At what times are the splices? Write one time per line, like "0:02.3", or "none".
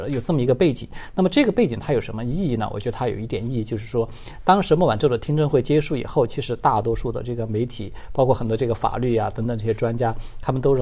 none

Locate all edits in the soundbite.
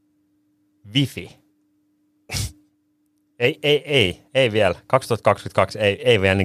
none

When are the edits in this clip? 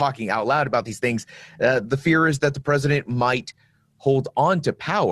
none

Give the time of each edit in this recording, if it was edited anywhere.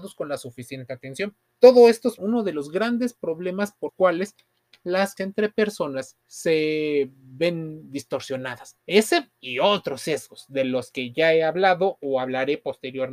0:01.5
0:02.2
0:03.9
0:05.2
0:06.2
0:08.8

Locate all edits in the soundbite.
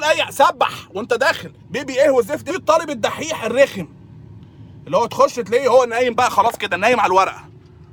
0:01.6
0:02.5

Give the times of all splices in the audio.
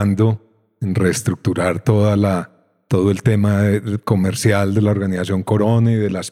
none

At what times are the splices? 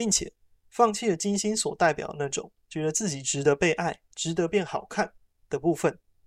0:02.6
0:04.1

